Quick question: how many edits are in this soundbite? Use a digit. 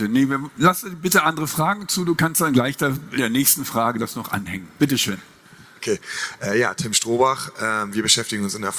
1